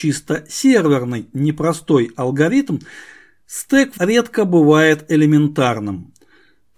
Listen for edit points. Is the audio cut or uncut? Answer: cut